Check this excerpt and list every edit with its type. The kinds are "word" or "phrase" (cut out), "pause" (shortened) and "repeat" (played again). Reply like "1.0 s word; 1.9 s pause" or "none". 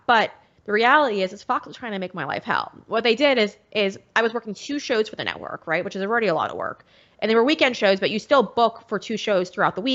none

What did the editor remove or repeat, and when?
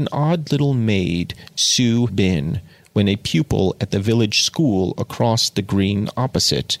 2.1 s word

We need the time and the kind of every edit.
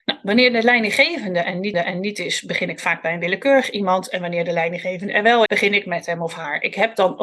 1.7 s repeat; 5.5 s word

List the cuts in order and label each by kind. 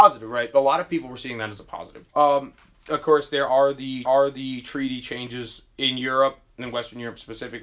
2.1 s pause; 4.1 s repeat

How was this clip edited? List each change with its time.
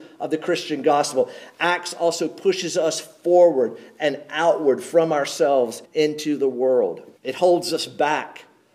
5.8 s pause; 7.2 s pause

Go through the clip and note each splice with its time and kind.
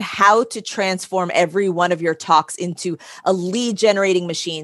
none

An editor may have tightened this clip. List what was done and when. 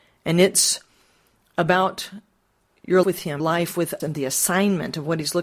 3.0 s word; 3.4 s word; 4.0 s word

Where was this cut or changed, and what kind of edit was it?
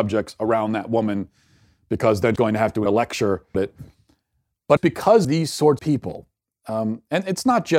2.4 s word; 2.9 s word; 3.5 s word; 4.8 s word; 5.2 s word; 5.8 s word

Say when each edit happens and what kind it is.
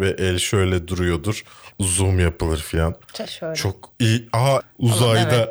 1.7 s word; 3.3 s word; 3.9 s pause; 4.6 s word

